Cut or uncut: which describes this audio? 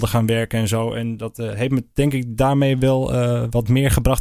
uncut